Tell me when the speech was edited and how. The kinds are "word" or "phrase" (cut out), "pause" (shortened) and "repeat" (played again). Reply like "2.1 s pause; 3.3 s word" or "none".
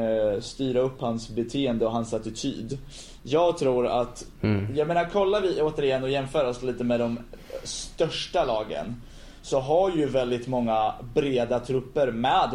none